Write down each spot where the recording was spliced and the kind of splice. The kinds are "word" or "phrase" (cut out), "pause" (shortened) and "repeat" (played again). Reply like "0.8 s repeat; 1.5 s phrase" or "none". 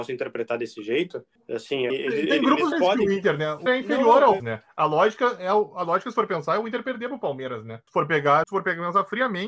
1.9 s word; 2.7 s phrase; 3.7 s word; 4.4 s word; 7.9 s pause; 8.4 s word